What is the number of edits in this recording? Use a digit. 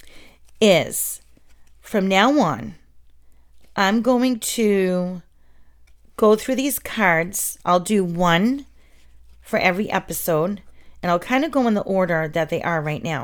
0